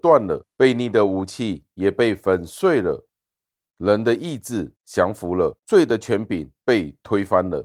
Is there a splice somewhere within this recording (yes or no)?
yes